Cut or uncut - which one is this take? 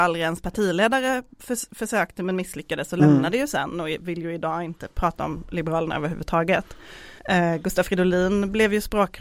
cut